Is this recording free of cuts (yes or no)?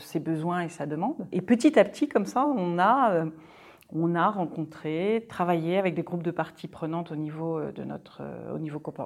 yes